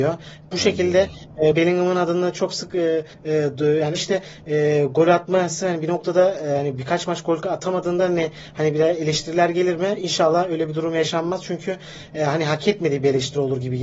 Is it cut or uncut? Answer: cut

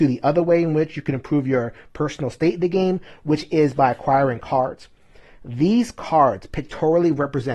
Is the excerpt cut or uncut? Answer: uncut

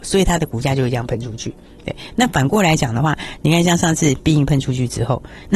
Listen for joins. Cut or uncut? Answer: uncut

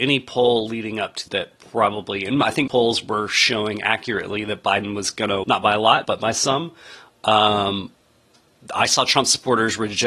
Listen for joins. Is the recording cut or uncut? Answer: cut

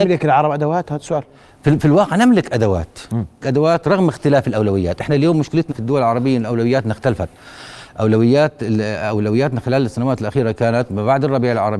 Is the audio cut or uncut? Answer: cut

